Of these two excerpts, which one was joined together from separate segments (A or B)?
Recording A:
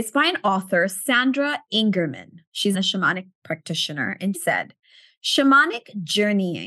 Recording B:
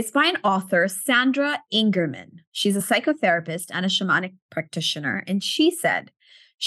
A